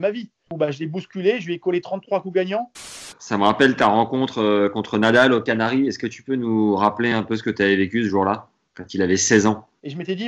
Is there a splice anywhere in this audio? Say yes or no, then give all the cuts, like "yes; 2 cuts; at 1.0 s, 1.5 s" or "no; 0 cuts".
no; 0 cuts